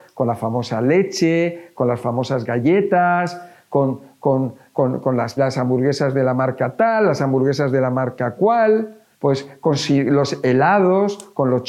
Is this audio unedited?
no; 2 cuts; at 5.4 s, 9.1 s

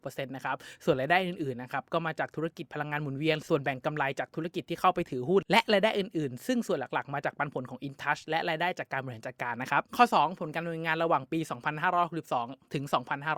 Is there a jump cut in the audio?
yes; 1 cut; at 9.9 s

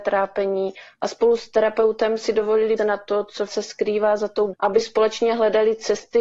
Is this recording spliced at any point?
yes; 3 cuts; at 2.8 s, 3.5 s, 4.5 s

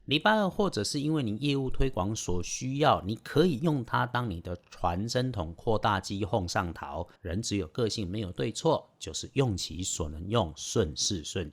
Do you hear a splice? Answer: yes; 1 cut; at 7.2 s

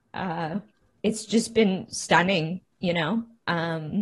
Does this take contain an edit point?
no; 0 cuts

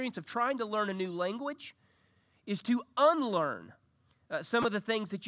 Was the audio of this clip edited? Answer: no; 0 cuts

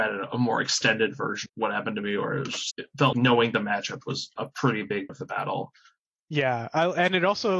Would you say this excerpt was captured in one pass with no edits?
no; 5 cuts; at 1.5 s, 2.7 s, 3.1 s, 5.1 s, 6.0 s

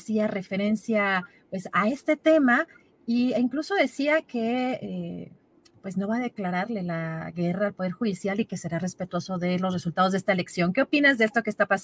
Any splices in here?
no; 0 cuts

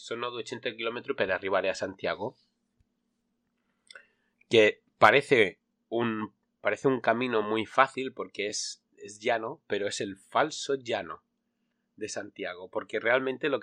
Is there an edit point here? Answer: no; 0 cuts

